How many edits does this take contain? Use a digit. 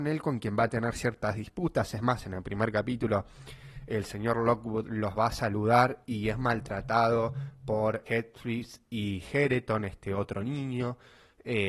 1